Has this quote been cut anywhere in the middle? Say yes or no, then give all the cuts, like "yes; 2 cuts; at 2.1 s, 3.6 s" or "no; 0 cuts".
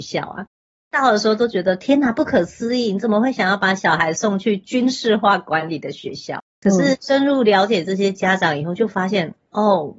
yes; 1 cut; at 6.5 s